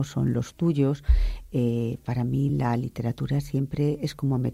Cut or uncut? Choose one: uncut